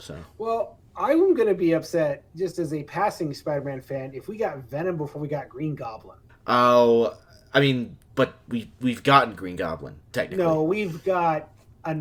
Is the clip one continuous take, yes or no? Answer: no